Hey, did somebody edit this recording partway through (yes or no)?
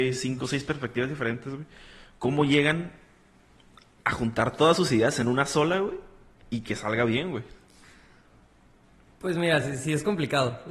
no